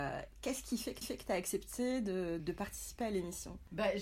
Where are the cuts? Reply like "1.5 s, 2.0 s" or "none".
1.0 s, 2.4 s